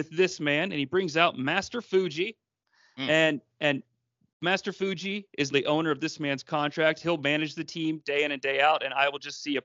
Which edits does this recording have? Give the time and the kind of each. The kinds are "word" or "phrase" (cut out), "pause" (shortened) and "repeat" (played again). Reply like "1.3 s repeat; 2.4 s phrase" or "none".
5.5 s word